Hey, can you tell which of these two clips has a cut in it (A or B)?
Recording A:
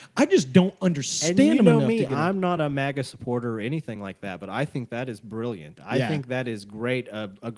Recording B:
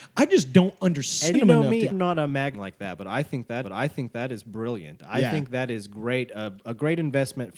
B